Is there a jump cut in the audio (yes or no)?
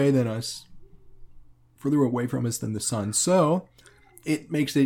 no